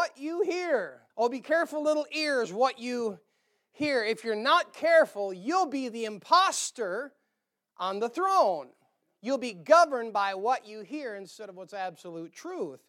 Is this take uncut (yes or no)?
no